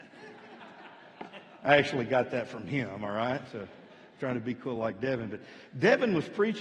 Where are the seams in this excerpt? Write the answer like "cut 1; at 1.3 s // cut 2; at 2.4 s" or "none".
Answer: none